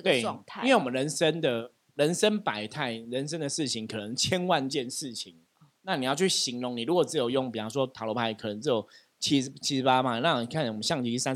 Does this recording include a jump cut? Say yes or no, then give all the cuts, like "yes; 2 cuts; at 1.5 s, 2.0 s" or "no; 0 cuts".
no; 0 cuts